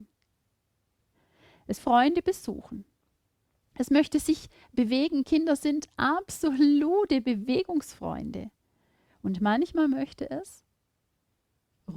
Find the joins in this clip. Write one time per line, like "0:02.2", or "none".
0:01.8